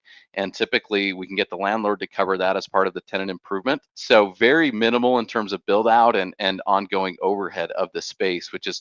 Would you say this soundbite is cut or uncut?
cut